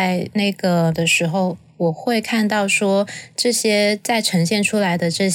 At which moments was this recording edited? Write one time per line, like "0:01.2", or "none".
0:00.9